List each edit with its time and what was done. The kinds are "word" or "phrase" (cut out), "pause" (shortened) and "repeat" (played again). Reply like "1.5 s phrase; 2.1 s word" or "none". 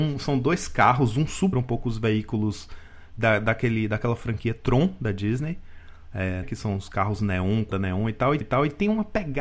1.5 s phrase; 6.4 s word; 7.7 s word; 8.4 s repeat